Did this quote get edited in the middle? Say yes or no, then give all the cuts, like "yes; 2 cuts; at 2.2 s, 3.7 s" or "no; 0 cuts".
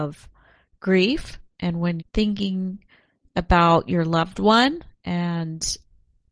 yes; 1 cut; at 2.0 s